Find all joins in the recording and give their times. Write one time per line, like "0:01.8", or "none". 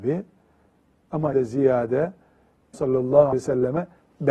0:01.3
0:02.7
0:03.3